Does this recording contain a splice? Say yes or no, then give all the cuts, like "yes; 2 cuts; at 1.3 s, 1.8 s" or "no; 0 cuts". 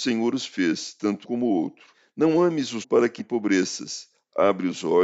yes; 4 cuts; at 1.2 s, 1.9 s, 2.8 s, 3.2 s